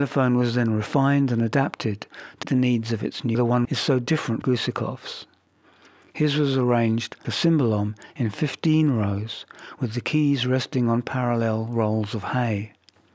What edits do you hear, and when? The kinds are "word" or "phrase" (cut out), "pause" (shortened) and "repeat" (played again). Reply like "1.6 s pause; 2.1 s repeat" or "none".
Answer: 2.4 s word; 3.3 s phrase; 3.6 s phrase; 4.4 s word; 7.2 s word